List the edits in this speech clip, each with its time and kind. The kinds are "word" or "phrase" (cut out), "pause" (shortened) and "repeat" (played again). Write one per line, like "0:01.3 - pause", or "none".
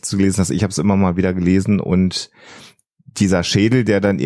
none